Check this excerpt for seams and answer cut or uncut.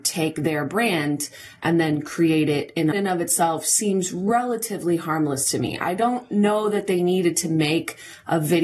cut